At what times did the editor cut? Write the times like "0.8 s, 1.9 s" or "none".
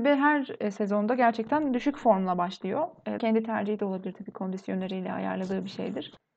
3.2 s